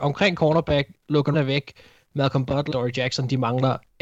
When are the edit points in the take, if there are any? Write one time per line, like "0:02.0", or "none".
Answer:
0:01.3
0:02.7

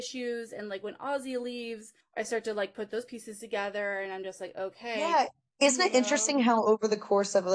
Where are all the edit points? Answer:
none

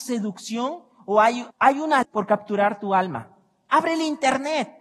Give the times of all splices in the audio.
0:01.5
0:02.0

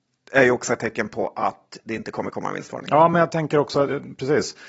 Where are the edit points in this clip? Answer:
none

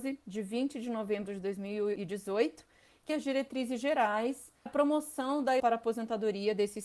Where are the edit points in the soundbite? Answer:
0:03.1
0:04.7
0:05.6

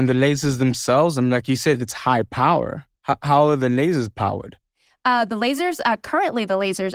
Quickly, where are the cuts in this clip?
none

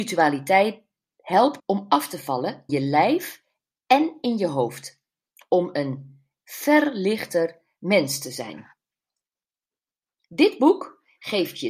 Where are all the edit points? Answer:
0:01.6
0:02.7
0:06.4

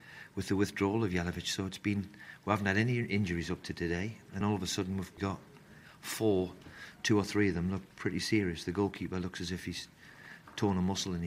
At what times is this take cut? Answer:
0:04.4
0:05.2
0:07.9

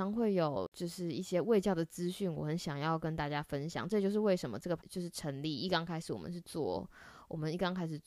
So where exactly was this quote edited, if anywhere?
0:04.8

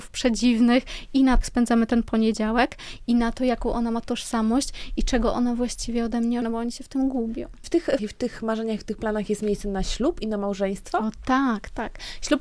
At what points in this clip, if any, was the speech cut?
0:01.4
0:06.4
0:07.6
0:08.0

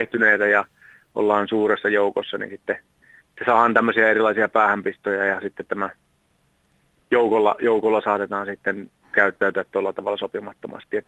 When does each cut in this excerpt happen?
none

